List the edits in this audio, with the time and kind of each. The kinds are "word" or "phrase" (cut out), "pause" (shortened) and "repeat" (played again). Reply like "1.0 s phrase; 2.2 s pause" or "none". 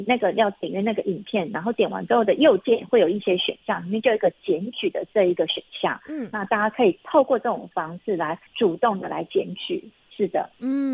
8.5 s pause